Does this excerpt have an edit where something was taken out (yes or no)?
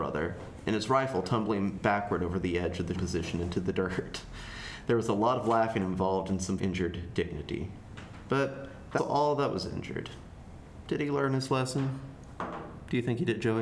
yes